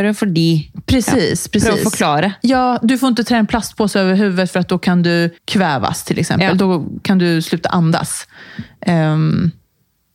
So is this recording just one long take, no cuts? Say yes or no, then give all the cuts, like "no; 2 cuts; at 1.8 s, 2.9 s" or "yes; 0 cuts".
no; 1 cut; at 5.4 s